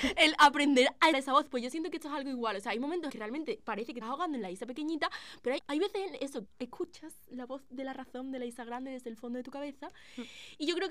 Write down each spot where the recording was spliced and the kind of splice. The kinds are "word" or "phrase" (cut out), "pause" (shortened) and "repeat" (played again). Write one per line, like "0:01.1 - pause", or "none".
0:01.1 - word
0:03.1 - phrase
0:04.0 - word
0:05.6 - word
0:06.4 - word